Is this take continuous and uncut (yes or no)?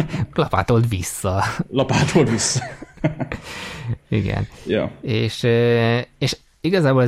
yes